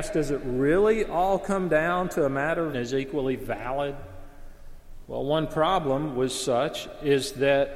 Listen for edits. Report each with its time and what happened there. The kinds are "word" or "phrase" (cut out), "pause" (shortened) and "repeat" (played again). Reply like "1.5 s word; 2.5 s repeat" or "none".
2.7 s phrase